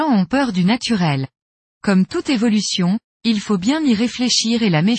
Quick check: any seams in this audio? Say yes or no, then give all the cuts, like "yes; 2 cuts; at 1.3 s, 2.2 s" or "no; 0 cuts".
no; 0 cuts